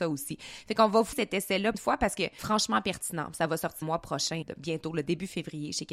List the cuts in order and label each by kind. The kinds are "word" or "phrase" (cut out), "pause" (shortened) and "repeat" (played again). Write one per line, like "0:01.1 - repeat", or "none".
0:01.1 - word
0:01.7 - word
0:02.4 - word
0:03.8 - word
0:04.4 - word